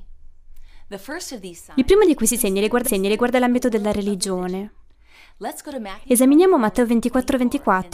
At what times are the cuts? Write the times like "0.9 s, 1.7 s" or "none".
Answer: 2.8 s